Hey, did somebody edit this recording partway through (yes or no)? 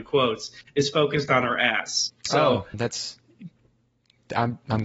yes